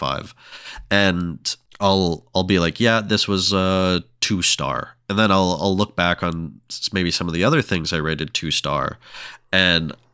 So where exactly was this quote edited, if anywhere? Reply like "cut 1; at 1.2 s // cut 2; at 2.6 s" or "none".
none